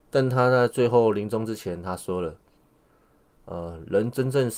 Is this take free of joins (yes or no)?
yes